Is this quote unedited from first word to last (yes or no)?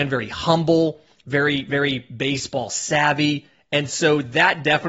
yes